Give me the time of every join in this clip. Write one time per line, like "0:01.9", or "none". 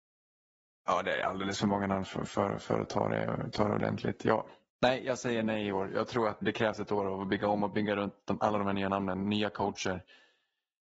0:06.4

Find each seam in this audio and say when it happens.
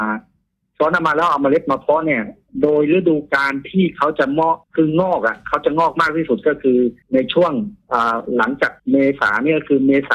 0:04.6
0:07.0
0:08.8

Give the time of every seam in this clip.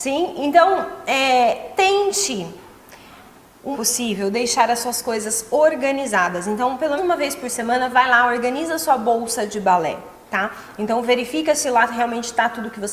0:03.7
0:07.0

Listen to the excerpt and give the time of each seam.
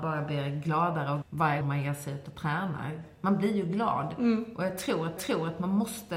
0:01.2
0:01.6
0:05.2

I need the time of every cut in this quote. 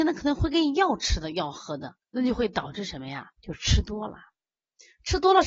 0:02.0
0:03.3

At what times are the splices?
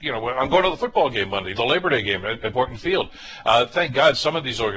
0:01.5
0:02.5

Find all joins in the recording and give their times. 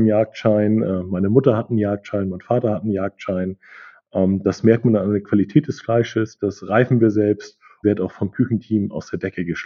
0:07.8

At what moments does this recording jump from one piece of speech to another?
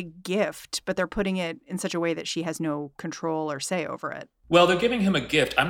0:04.3

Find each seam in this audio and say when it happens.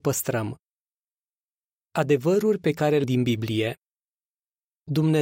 0:03.0

